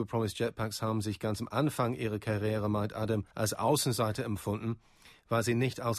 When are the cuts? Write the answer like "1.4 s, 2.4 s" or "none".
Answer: 3.3 s